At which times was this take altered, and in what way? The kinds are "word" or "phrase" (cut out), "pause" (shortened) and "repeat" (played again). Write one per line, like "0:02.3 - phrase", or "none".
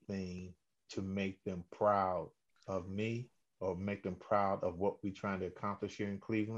none